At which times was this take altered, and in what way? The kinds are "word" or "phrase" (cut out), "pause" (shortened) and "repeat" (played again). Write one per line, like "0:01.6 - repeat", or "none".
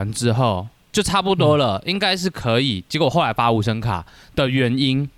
none

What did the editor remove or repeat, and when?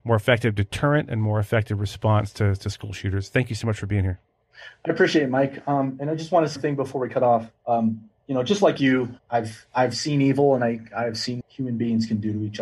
0:06.6 - phrase
0:07.6 - pause
0:09.2 - word
0:11.4 - word

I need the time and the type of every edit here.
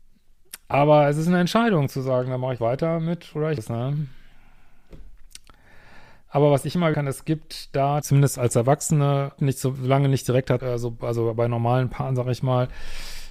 0:02.6 - word
0:03.6 - word
0:06.9 - phrase
0:08.0 - word
0:09.4 - phrase
0:10.6 - phrase

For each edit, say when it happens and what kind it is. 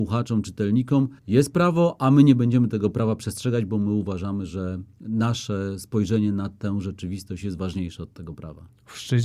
0:01.2 - pause

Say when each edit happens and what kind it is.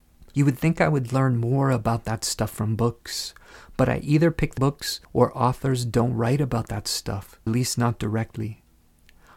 0:04.6 - word
0:05.0 - pause
0:07.5 - word

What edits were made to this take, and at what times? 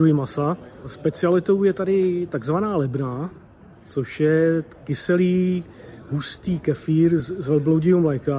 none

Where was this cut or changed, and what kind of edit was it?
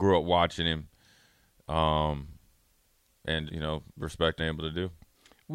0:03.5 - word
0:03.9 - pause
0:04.4 - phrase

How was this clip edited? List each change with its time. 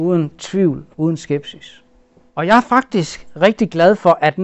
0:00.9 - pause
0:02.2 - pause

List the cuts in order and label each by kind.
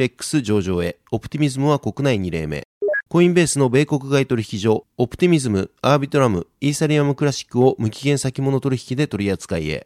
0:03.1 - pause

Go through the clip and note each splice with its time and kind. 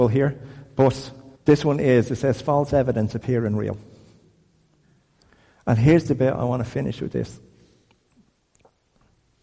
0:01.3 - pause

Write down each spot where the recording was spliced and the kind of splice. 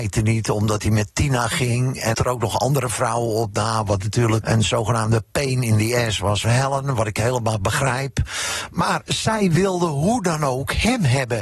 0:02.1 - phrase
0:04.4 - word
0:06.4 - word

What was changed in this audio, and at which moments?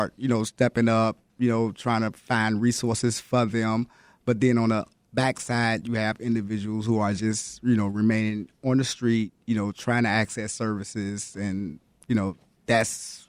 none

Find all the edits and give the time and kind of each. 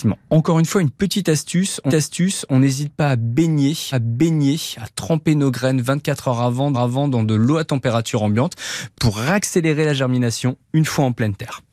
0:01.9 - repeat
0:03.9 - repeat
0:06.7 - repeat

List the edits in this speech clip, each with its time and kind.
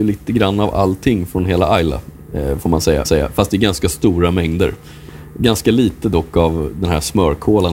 0:03.0 - repeat

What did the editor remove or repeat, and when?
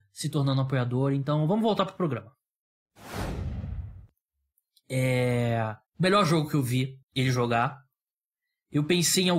0:05.9 - pause
0:07.0 - pause

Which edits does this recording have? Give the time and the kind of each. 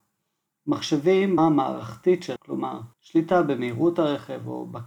0:01.4 - word
0:02.4 - word
0:02.9 - pause

